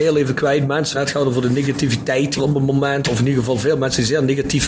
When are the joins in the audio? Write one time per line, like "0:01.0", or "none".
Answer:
0:00.9
0:02.4